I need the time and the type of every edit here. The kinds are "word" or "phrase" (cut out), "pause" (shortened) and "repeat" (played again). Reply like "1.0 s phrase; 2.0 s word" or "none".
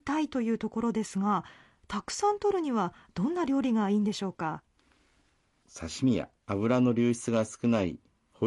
none